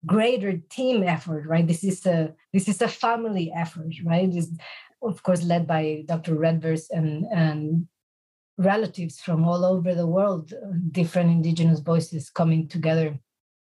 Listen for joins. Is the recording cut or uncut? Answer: uncut